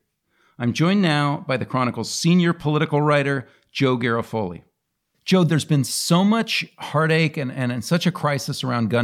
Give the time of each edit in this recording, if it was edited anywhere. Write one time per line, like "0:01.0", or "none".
none